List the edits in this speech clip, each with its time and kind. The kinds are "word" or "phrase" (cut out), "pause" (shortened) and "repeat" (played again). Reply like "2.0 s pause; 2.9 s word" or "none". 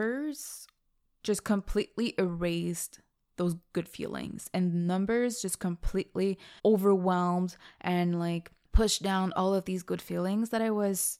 6.6 s pause

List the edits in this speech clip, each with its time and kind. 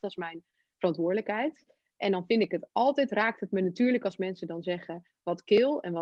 none

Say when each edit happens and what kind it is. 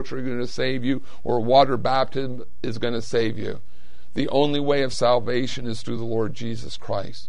none

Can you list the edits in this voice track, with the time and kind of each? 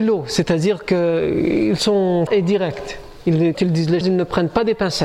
2.3 s word; 3.5 s word; 4.0 s word

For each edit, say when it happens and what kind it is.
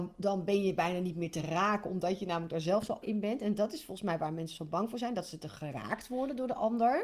3.0 s word

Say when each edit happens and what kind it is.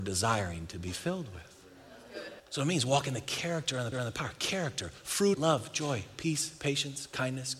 2.4 s pause; 3.9 s repeat; 5.3 s phrase

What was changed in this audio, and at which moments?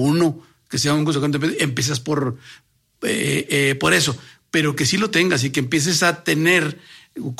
none

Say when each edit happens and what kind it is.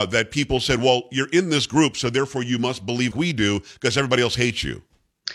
3.1 s word

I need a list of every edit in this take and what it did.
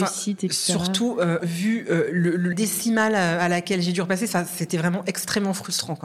1.4 s word; 2.5 s word

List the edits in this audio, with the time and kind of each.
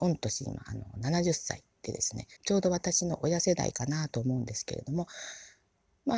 2.4 s pause

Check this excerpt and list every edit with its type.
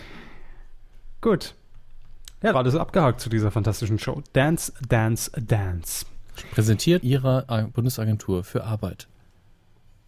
2.5 s phrase; 7.0 s word

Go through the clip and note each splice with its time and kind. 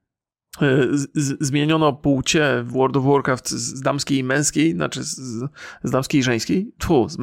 none

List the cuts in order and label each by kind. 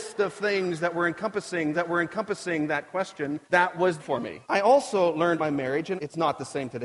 1.7 s repeat; 3.4 s pause; 4.0 s phrase; 4.4 s pause; 5.4 s phrase; 6.0 s word

